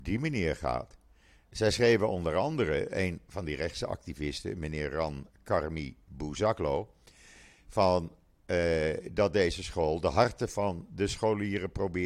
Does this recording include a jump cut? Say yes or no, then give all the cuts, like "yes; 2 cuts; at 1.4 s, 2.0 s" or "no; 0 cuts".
no; 0 cuts